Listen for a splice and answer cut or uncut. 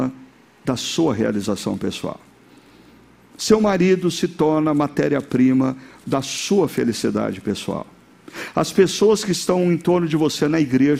uncut